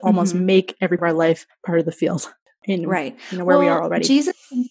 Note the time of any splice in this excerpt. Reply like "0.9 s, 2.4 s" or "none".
1.0 s